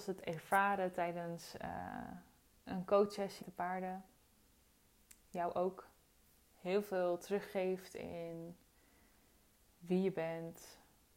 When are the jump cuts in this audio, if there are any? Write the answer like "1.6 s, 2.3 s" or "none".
3.4 s